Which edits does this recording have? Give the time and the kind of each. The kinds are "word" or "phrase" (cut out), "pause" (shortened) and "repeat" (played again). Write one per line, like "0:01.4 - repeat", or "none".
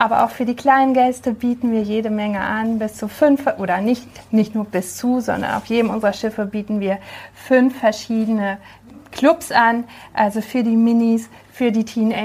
none